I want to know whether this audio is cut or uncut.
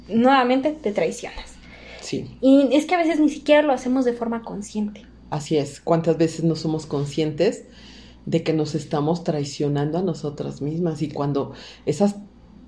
uncut